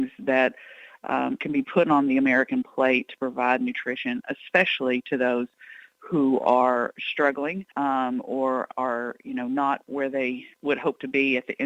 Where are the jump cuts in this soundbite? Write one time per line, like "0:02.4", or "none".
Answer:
0:07.7
0:10.5